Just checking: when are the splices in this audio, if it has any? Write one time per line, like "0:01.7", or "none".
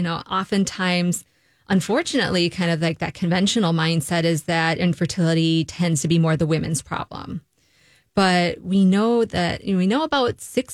none